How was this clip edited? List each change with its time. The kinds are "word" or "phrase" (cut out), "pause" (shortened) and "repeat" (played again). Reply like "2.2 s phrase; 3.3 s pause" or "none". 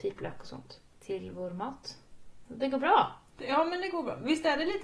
none

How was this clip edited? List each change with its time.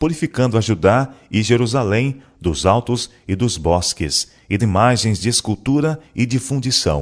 4.6 s word

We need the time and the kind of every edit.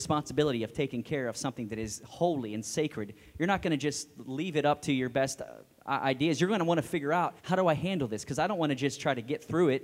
7.4 s pause

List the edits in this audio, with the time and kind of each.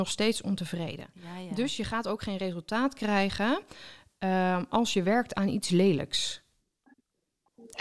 none

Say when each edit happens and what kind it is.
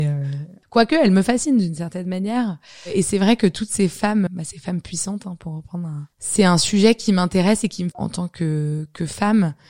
4.3 s word; 6.1 s pause; 7.9 s phrase

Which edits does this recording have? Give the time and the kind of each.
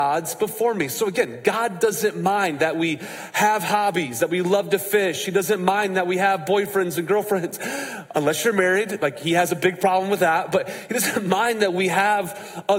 none

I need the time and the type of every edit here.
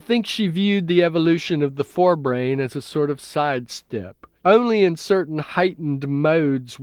4.4 s pause

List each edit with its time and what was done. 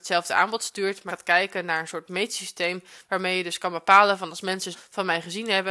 1.1 s word; 4.7 s word

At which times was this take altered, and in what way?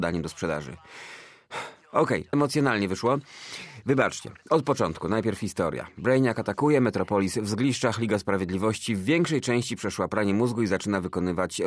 2.3 s word

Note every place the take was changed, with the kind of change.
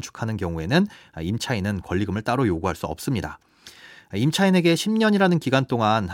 none

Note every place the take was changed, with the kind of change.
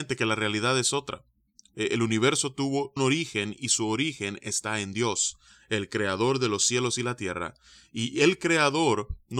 3.0 s word

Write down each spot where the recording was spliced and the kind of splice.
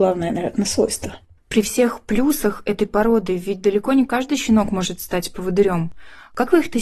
1.4 s pause

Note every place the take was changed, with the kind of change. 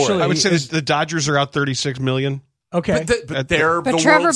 none

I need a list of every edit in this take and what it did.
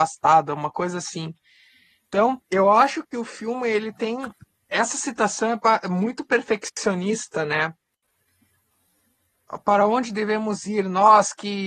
2.4 s pause; 4.4 s pause

